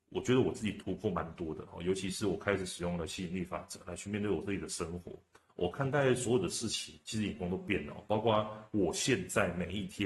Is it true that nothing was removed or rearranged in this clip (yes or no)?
yes